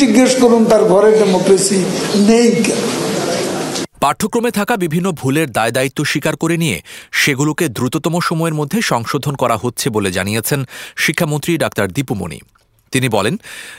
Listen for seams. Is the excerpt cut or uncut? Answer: cut